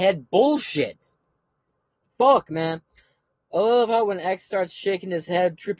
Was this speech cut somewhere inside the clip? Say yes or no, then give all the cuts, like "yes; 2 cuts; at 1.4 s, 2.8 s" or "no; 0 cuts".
no; 0 cuts